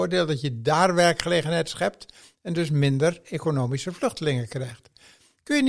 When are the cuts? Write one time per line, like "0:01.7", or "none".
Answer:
none